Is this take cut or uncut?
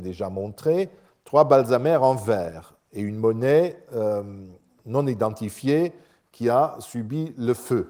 uncut